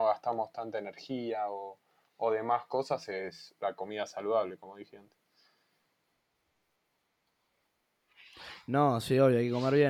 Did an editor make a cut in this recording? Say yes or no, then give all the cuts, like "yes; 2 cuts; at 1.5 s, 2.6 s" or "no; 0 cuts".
no; 0 cuts